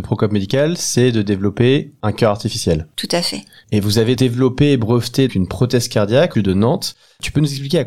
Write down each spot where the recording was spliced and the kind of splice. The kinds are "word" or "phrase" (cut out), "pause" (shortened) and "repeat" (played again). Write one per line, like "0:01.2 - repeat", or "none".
0:04.2 - word
0:05.3 - word
0:06.3 - phrase

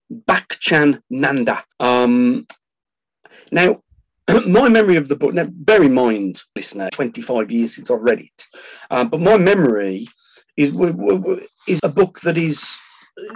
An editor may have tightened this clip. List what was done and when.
0:01.7 - pause
0:06.6 - word
0:06.9 - phrase
0:11.8 - word

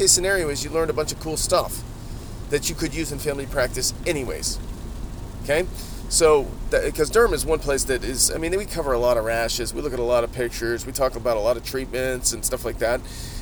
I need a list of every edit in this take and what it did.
none

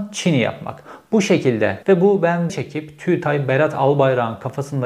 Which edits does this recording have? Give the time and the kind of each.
0:01.8 - word
0:02.5 - phrase

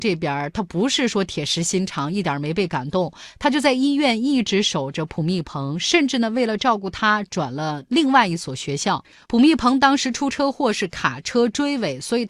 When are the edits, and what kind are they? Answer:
none

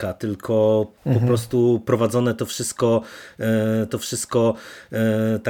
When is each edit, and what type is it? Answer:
0:03.9 - repeat

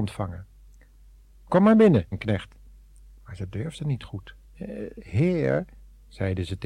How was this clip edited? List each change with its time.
0:02.1 - word
0:04.4 - pause

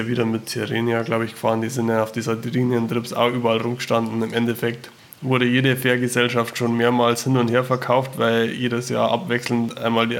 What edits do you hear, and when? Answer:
none

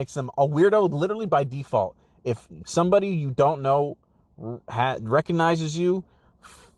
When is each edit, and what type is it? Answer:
none

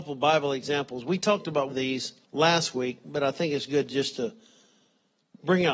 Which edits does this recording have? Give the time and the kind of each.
0:01.7 - word
0:02.2 - pause

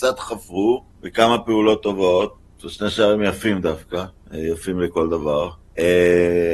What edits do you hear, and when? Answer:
none

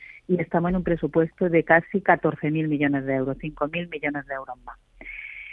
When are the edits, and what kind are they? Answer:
none

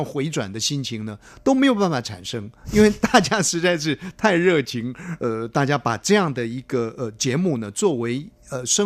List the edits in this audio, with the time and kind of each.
0:05.2 - phrase

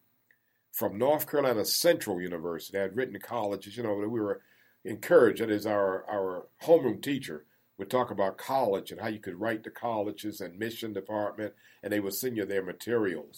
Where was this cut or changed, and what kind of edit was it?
none

